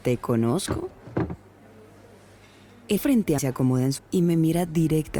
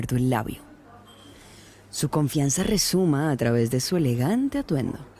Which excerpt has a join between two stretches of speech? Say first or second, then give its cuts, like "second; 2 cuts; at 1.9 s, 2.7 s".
first; 3 cuts; at 3.0 s, 3.4 s, 4.0 s